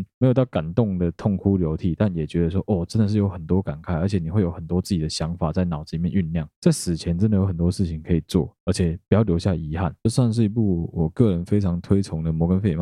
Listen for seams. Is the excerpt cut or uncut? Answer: uncut